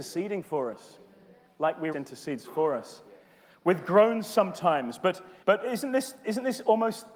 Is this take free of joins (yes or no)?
no